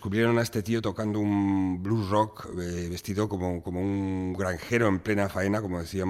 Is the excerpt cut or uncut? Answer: uncut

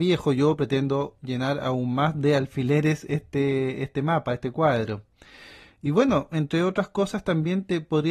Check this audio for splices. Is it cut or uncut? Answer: uncut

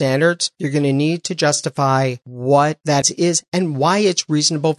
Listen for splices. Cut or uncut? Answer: cut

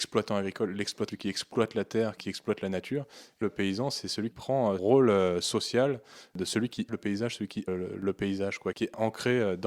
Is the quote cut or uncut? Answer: cut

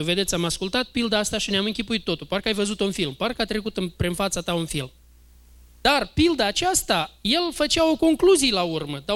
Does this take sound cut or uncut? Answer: uncut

